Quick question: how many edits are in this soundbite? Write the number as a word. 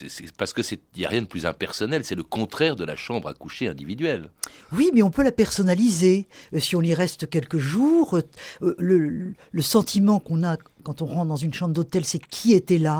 zero